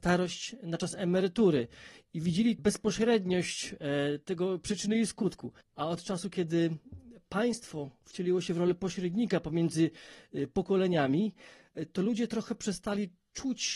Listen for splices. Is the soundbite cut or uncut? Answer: cut